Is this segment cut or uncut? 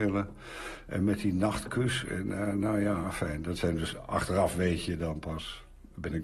uncut